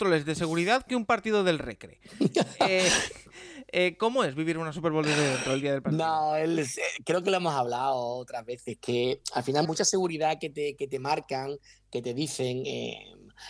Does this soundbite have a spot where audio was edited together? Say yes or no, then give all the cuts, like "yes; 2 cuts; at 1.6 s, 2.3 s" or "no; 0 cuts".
yes; 1 cut; at 9.6 s